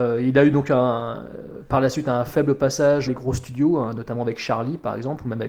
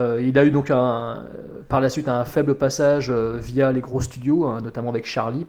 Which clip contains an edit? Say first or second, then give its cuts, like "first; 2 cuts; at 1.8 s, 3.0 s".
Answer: first; 1 cut; at 3.1 s